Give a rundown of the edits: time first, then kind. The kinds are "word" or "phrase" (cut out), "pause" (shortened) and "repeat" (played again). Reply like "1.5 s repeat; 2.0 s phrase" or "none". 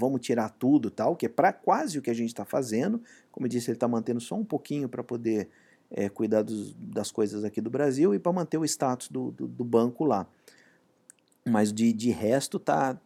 none